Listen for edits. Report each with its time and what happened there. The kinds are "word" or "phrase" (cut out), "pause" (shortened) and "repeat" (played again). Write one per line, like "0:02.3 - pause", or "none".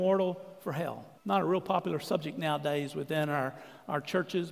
0:01.2 - pause

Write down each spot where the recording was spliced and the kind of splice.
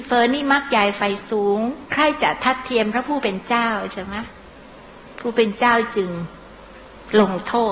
0:04.7 - pause

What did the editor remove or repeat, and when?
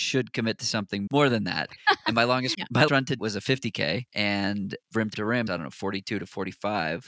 0:01.1 - word
0:02.5 - word
0:02.9 - word
0:03.2 - word
0:04.1 - pause
0:05.1 - word
0:05.5 - word

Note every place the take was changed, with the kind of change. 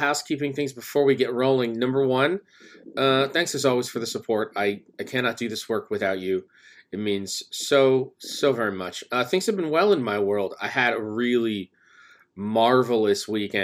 none

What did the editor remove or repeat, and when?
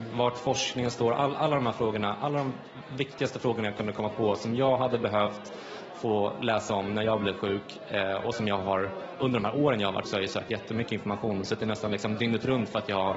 0:10.0 - word

